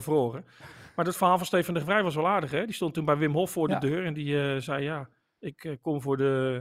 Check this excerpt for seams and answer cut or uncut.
uncut